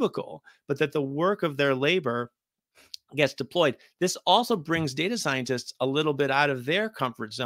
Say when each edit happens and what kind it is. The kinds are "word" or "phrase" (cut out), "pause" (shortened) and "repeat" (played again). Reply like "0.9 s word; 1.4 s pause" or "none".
none